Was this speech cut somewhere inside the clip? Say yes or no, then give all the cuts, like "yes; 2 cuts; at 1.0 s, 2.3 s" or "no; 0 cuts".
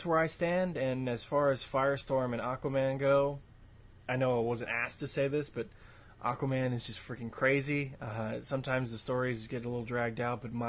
no; 0 cuts